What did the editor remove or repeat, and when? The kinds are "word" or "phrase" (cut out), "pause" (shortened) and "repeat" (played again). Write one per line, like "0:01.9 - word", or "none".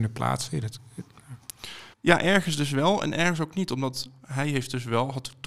0:01.9 - pause